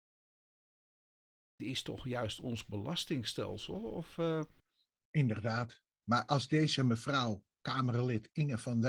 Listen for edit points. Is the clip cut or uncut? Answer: uncut